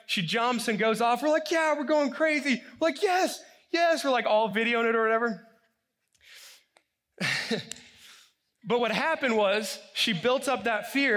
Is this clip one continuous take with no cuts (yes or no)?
yes